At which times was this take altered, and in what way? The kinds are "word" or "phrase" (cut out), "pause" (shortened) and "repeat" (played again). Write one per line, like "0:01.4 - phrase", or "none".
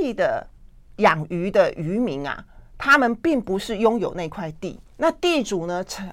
0:04.9 - pause